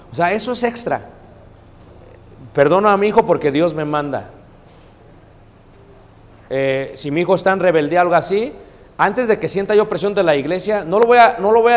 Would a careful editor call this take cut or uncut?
uncut